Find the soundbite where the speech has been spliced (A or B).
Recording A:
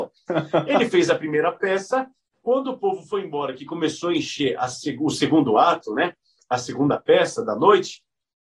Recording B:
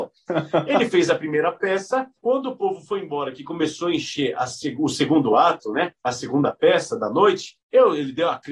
B